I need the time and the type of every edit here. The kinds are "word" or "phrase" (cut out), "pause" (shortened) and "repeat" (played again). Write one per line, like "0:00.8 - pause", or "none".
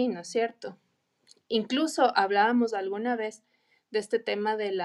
none